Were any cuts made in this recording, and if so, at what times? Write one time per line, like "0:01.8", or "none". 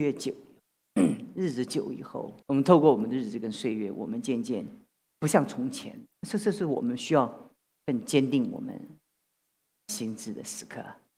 0:02.4
0:05.1
0:06.1
0:07.7